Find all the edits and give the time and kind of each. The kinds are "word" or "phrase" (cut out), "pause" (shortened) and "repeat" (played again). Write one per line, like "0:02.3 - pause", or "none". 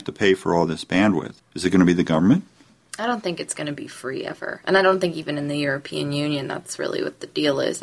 0:01.4 - pause